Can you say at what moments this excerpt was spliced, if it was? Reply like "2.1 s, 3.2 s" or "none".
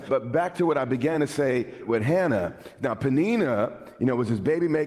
none